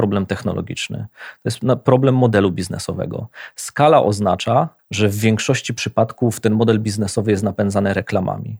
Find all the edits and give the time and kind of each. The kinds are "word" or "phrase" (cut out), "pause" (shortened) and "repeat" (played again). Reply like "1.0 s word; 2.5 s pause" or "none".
4.8 s pause

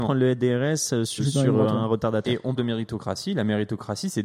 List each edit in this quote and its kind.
1.2 s word; 2.6 s word

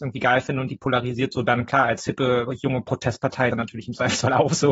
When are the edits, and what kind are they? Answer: 3.5 s phrase

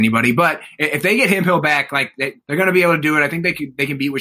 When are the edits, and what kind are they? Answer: 2.4 s pause

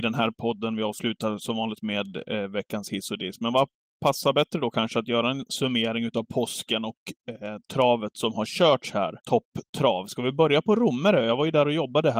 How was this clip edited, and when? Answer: 3.9 s pause; 9.2 s pause

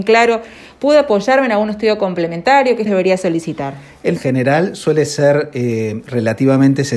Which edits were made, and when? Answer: 2.9 s word; 4.2 s phrase

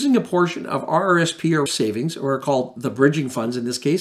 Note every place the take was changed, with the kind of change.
1.7 s word

